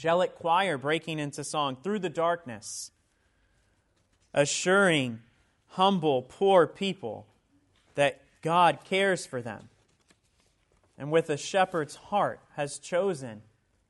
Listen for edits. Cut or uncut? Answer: uncut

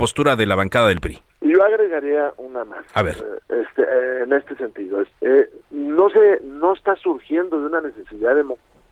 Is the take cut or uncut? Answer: cut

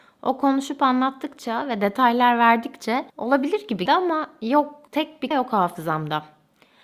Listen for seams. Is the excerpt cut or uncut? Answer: cut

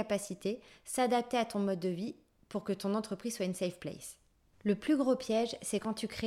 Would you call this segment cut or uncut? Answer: uncut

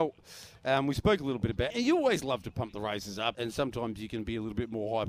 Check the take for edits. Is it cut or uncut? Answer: cut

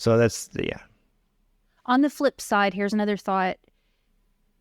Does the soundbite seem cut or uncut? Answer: uncut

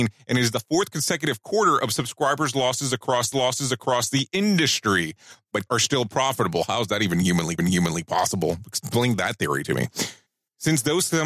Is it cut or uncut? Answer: cut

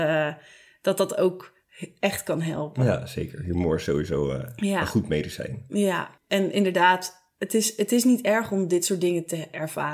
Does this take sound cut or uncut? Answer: cut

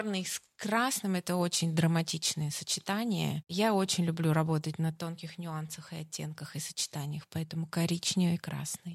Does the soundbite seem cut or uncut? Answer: uncut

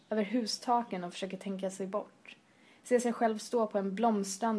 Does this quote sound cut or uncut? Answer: uncut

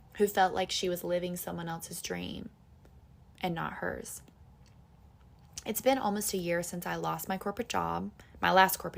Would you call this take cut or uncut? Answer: uncut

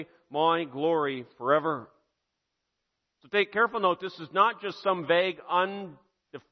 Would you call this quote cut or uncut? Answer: uncut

